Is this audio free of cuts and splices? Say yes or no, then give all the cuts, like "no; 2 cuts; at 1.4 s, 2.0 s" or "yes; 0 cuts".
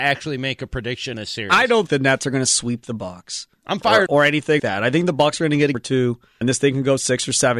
no; 6 cuts; at 1.1 s, 1.9 s, 4.1 s, 4.6 s, 5.7 s, 6.4 s